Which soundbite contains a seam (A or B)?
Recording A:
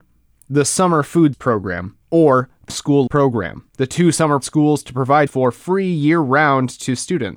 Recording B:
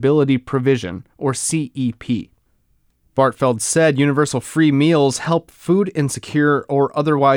A